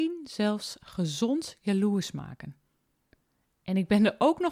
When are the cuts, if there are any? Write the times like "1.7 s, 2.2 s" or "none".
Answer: none